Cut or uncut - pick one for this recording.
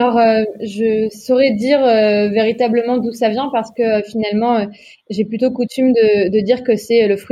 uncut